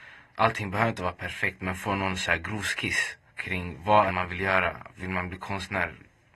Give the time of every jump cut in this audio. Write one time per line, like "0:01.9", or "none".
0:03.3
0:04.1